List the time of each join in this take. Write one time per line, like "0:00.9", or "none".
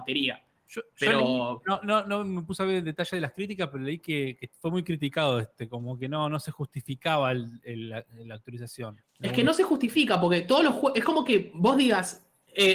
0:09.0